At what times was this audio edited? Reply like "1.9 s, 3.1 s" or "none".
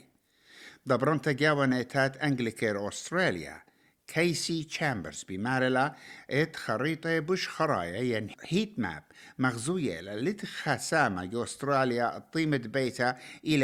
none